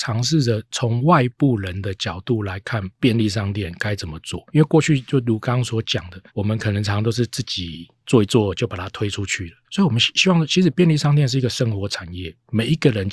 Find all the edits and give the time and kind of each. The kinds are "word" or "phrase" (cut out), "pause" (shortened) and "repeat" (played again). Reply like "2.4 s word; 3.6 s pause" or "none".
6.3 s pause; 9.6 s pause